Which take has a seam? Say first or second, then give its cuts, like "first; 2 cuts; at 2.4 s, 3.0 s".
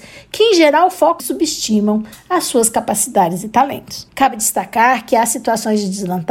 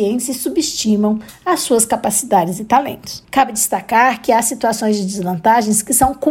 first; 1 cut; at 1.2 s